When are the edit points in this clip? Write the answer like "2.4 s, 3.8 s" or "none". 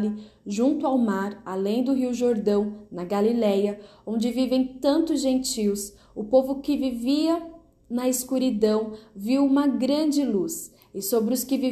none